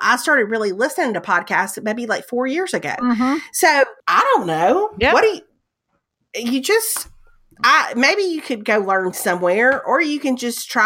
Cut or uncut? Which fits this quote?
cut